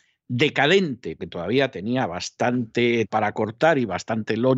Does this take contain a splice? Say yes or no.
yes